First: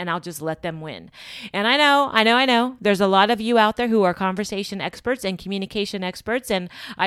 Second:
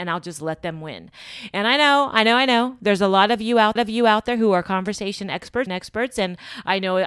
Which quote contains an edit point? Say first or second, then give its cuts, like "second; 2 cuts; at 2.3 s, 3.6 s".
second; 2 cuts; at 3.8 s, 5.7 s